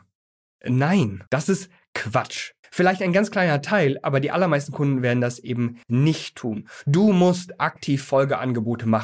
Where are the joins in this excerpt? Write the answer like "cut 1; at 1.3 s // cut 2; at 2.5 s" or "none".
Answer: cut 1; at 1.3 s // cut 2; at 2.6 s // cut 3; at 5.8 s